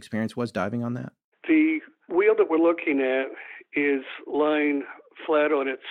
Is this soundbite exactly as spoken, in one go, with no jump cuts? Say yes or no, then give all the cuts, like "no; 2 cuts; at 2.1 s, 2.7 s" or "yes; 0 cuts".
yes; 0 cuts